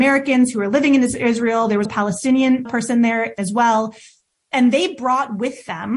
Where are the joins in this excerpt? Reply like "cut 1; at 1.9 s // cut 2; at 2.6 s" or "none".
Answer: cut 1; at 1.9 s // cut 2; at 2.7 s // cut 3; at 3.4 s